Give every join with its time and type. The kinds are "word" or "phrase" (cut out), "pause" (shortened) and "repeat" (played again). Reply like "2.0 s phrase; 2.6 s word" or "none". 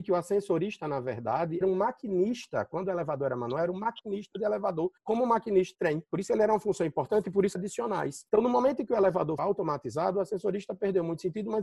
1.6 s word; 5.0 s pause; 5.7 s word; 6.1 s pause; 7.5 s phrase; 8.3 s pause; 9.4 s word

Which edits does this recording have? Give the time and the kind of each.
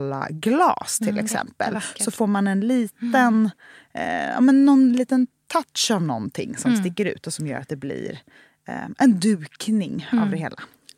none

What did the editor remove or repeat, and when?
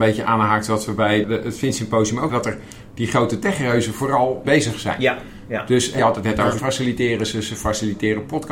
1.2 s word; 2.3 s word; 4.4 s word; 6.0 s word; 6.6 s word

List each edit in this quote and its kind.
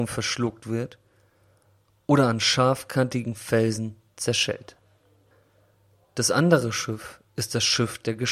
none

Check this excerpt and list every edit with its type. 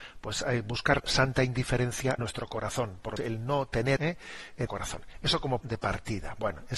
1.0 s word; 2.2 s word; 3.2 s word; 4.0 s word; 4.7 s word; 5.6 s word

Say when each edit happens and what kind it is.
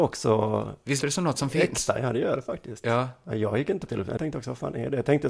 1.0 s word; 3.9 s phrase; 4.2 s word

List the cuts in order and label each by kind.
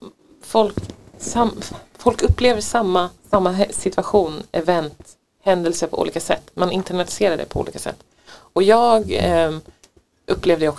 3.2 s pause

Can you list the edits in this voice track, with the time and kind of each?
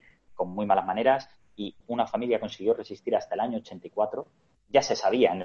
none

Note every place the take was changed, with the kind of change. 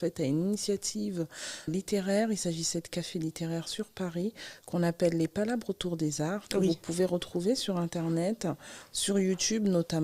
1.7 s word

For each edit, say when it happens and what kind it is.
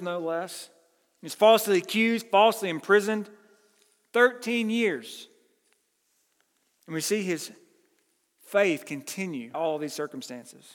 9.5 s word

